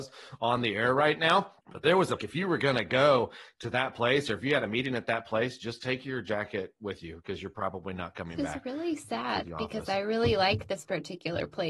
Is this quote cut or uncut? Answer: cut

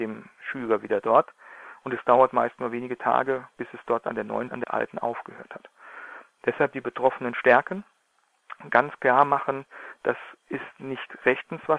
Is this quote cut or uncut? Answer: cut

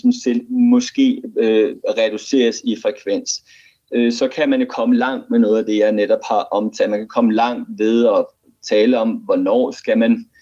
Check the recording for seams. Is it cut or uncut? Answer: uncut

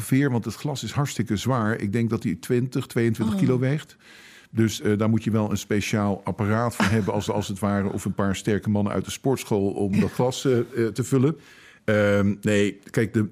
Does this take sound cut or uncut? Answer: cut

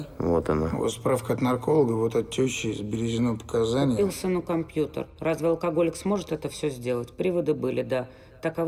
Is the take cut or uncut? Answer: uncut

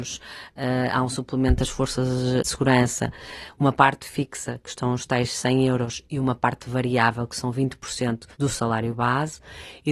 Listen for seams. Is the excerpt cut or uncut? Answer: cut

